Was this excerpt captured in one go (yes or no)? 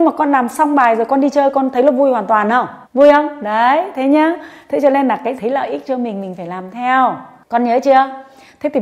no